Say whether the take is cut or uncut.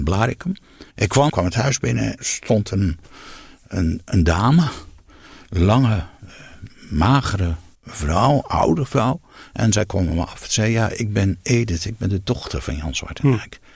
cut